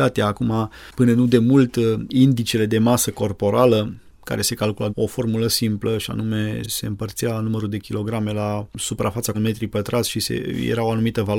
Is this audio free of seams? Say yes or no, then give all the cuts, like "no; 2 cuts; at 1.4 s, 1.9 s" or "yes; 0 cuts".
no; 3 cuts; at 4.9 s, 6.6 s, 9.3 s